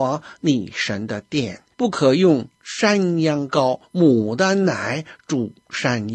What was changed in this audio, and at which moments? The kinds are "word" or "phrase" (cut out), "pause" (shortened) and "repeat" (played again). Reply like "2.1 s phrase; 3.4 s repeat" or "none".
1.7 s pause